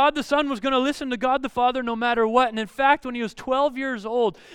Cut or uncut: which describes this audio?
uncut